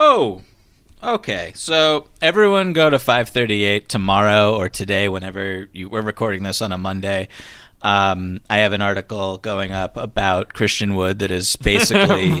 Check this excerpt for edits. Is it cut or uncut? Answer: uncut